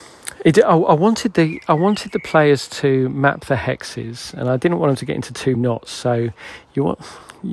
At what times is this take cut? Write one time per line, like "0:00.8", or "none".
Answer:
0:05.5